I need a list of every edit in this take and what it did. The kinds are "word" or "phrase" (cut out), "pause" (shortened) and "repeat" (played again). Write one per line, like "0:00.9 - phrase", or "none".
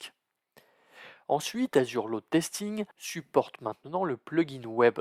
0:02.9 - pause